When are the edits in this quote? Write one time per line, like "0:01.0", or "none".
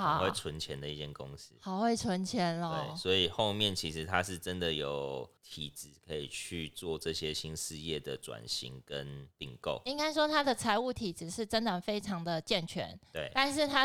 0:05.4